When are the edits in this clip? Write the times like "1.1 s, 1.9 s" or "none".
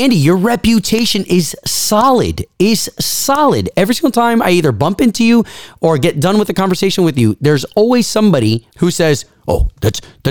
8.7 s